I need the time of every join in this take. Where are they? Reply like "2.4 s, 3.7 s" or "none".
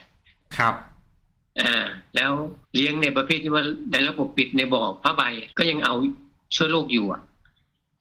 2.6 s, 5.5 s